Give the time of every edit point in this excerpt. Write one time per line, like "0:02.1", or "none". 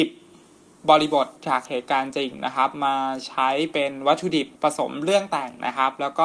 0:01.4
0:04.6